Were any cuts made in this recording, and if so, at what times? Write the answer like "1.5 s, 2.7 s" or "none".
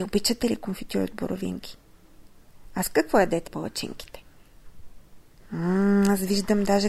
3.5 s